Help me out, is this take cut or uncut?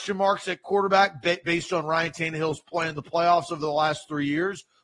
uncut